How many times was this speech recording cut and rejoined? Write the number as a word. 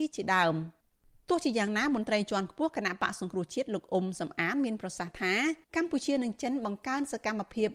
one